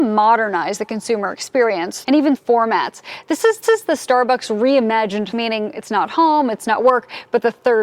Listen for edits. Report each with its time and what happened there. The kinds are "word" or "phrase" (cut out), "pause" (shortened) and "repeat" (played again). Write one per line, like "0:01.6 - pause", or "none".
0:02.0 - phrase
0:02.4 - phrase
0:03.6 - repeat
0:05.3 - phrase